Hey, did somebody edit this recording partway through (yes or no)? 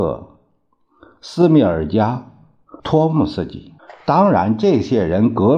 yes